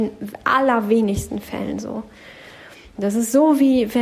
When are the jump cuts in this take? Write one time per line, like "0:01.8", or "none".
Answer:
none